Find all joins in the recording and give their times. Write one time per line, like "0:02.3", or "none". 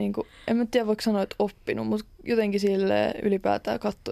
none